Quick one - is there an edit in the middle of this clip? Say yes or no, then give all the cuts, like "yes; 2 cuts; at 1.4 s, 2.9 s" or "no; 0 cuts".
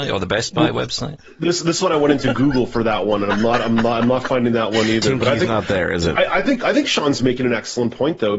no; 0 cuts